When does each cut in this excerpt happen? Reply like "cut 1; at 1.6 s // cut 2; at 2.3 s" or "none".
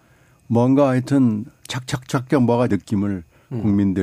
cut 1; at 2.7 s